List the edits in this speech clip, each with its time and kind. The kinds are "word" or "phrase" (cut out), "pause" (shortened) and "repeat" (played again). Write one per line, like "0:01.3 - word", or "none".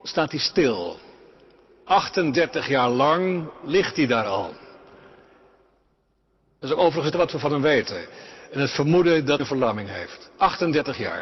0:07.1 - phrase
0:09.4 - word